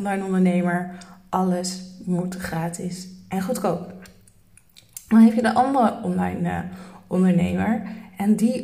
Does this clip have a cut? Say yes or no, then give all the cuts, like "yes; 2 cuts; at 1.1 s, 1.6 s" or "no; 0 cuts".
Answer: no; 0 cuts